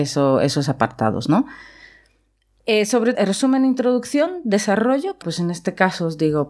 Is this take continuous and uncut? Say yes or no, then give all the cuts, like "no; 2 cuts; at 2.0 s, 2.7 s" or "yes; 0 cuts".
no; 2 cuts; at 3.1 s, 5.2 s